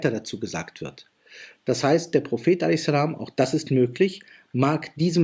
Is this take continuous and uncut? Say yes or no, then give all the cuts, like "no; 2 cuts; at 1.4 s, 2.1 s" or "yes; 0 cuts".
yes; 0 cuts